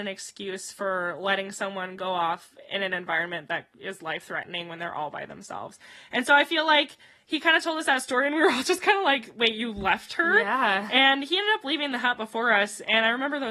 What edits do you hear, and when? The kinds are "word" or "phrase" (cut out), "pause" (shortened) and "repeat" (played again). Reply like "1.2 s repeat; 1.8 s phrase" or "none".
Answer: none

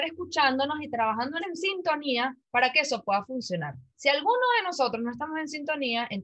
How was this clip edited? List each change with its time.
1.4 s phrase; 2.4 s pause; 3.9 s pause

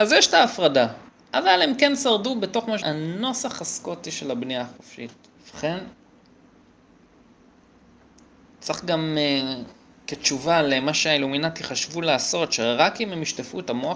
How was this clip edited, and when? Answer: 2.8 s word; 5.3 s pause

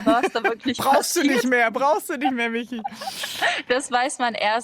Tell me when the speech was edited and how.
none

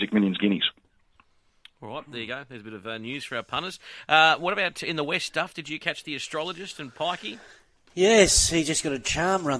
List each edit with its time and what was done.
none

